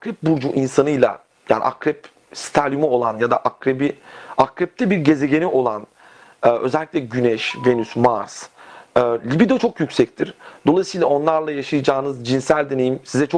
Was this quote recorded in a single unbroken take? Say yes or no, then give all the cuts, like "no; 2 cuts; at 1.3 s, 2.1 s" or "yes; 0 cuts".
yes; 0 cuts